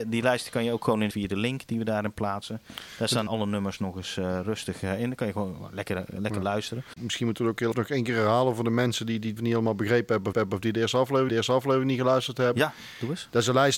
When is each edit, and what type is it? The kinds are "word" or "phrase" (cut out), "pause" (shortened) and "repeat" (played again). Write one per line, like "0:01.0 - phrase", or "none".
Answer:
0:01.1 - phrase
0:03.3 - word
0:07.7 - word
0:09.4 - word
0:10.3 - repeat
0:11.3 - repeat